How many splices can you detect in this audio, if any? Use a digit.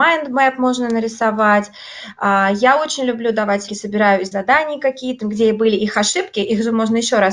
3